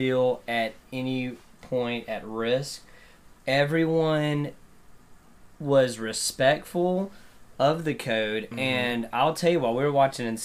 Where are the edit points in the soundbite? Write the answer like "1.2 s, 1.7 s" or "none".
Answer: none